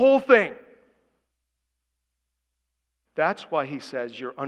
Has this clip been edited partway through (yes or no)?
no